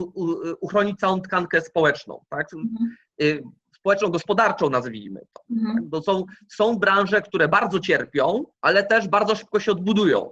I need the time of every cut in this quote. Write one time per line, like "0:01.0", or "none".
0:08.5